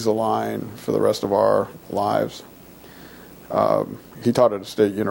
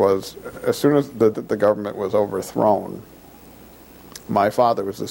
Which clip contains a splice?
second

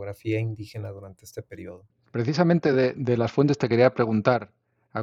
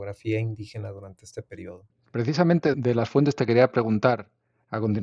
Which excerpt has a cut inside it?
second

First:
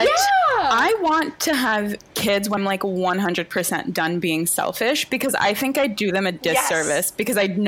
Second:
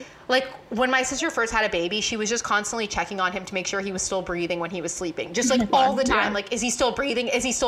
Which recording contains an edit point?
first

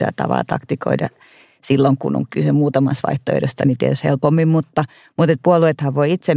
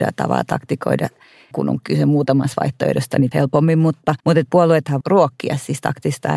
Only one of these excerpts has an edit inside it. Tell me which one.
second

